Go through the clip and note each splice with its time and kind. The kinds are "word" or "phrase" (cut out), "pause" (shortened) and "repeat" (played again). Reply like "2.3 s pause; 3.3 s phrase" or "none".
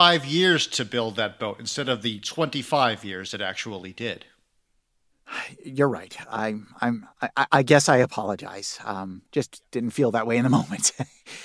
7.1 s pause; 9.3 s pause